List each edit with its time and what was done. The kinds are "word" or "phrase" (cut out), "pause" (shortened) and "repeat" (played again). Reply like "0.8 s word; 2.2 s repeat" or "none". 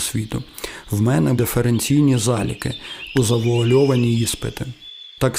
1.3 s word; 3.1 s word